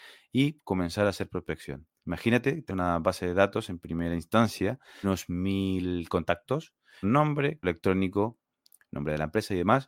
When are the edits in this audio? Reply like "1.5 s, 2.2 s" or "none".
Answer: 2.0 s, 2.7 s, 5.0 s, 7.0 s, 7.6 s